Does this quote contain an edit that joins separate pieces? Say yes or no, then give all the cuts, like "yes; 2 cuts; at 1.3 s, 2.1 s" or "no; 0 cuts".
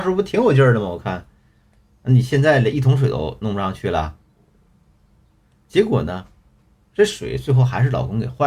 no; 0 cuts